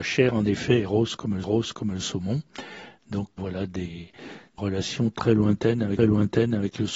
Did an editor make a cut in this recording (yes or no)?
yes